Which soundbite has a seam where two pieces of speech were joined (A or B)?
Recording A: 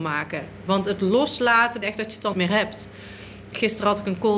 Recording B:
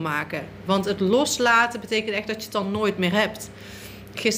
A